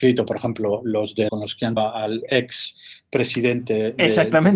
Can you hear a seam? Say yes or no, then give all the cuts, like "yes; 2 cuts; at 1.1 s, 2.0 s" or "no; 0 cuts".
yes; 2 cuts; at 1.3 s, 1.8 s